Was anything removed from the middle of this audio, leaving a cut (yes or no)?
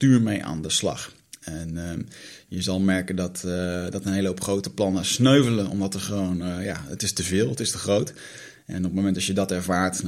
no